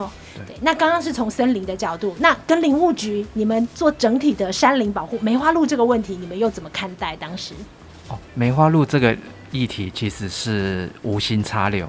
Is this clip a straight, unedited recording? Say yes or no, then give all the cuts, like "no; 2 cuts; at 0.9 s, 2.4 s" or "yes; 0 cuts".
no; 1 cut; at 8.3 s